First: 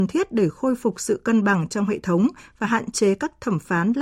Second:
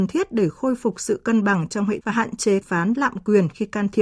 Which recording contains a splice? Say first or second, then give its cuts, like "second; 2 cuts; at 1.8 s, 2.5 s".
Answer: second; 2 cuts; at 2.0 s, 2.6 s